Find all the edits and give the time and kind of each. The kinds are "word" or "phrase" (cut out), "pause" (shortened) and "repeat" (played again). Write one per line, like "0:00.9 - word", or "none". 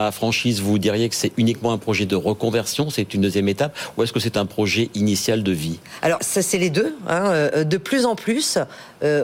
0:06.2 - word